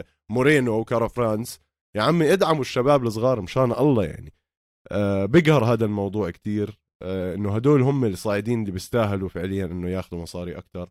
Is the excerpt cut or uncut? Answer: uncut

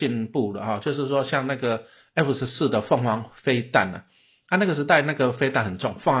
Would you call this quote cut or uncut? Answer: uncut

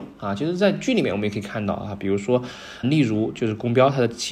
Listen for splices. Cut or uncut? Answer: cut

